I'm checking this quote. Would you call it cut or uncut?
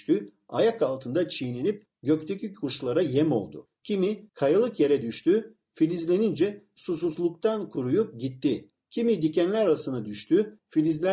uncut